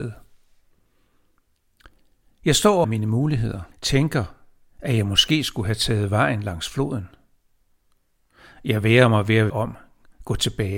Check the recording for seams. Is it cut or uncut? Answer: cut